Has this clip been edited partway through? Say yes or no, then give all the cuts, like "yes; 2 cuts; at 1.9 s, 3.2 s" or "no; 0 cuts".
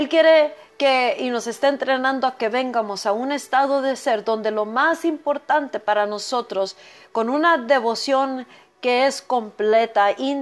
no; 0 cuts